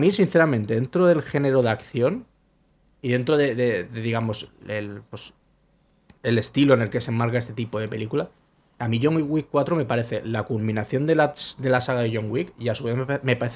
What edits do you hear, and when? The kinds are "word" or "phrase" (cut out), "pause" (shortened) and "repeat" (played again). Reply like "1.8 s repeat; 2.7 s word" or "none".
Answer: none